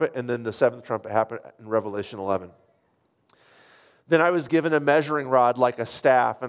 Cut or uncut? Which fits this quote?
uncut